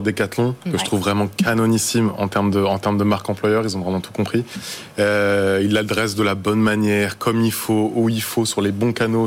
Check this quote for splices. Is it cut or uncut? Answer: uncut